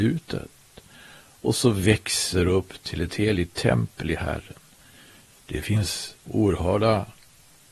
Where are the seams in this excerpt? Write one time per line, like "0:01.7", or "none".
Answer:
0:06.2